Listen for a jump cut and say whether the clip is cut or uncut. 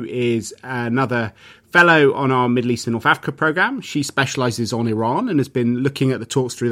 uncut